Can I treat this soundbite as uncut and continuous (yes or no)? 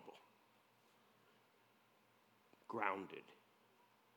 yes